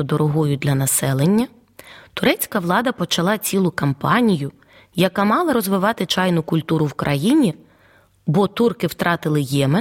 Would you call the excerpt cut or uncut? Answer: uncut